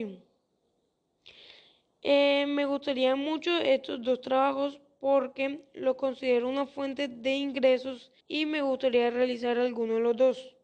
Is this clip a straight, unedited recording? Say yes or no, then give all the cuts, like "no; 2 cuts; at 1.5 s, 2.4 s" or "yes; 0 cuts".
no; 1 cut; at 8.2 s